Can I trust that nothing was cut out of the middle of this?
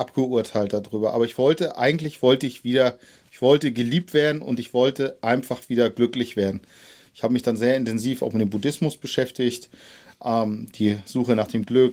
yes; 0 cuts

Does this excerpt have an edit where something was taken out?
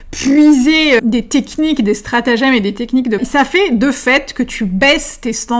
yes; 2 cuts; at 1.0 s, 3.2 s

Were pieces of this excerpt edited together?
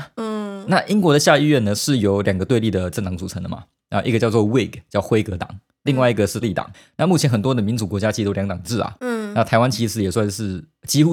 yes; 1 cut; at 6.4 s

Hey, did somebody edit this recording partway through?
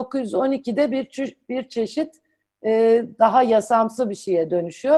no; 0 cuts

